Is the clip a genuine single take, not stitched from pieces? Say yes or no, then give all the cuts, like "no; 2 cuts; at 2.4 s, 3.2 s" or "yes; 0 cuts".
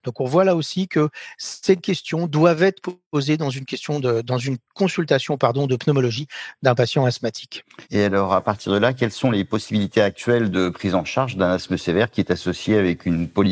no; 1 cut; at 7.8 s